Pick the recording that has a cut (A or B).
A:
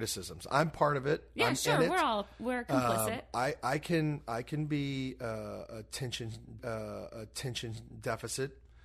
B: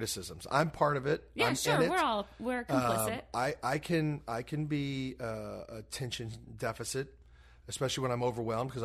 A